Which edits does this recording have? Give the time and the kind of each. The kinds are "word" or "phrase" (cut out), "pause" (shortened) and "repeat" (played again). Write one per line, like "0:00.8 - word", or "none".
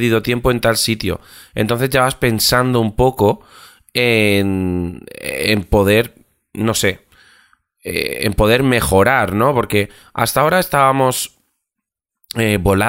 none